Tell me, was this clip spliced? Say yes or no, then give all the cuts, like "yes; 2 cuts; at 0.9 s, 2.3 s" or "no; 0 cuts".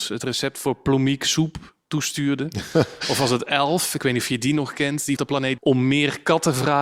yes; 2 cuts; at 5.2 s, 5.6 s